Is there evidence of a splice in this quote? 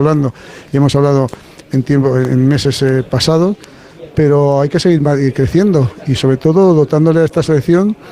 no; 0 cuts

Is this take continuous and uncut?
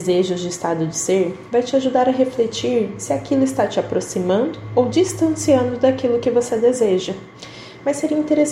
yes; 0 cuts

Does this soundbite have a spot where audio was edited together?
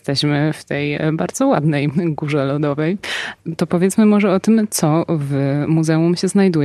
no; 0 cuts

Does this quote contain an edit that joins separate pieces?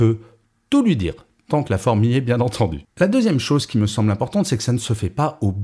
no; 0 cuts

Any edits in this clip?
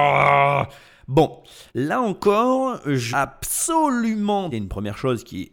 yes; 3 cuts; at 1.7 s, 3.1 s, 4.5 s

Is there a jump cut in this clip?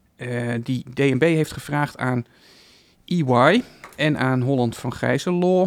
no; 0 cuts

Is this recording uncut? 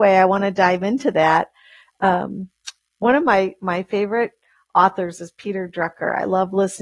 yes; 0 cuts

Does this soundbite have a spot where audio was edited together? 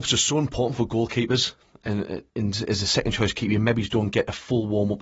yes; 1 cut; at 2.3 s

